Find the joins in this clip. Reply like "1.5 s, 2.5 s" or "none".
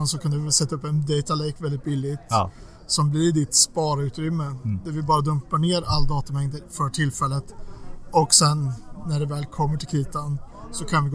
none